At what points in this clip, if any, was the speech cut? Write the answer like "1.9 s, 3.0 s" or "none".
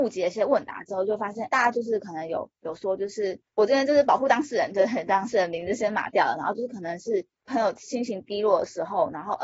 1.5 s, 3.5 s